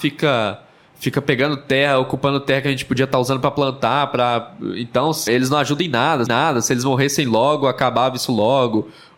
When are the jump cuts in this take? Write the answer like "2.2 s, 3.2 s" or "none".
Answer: 5.3 s, 6.3 s